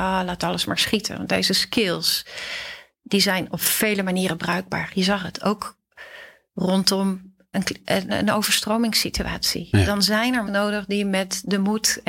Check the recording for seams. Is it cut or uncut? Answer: cut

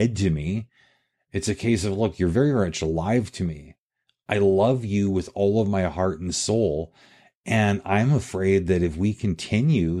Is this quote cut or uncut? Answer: uncut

